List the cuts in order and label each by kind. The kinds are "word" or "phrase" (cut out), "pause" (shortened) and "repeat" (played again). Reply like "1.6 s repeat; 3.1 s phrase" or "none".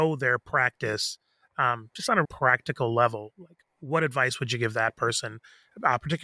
2.2 s word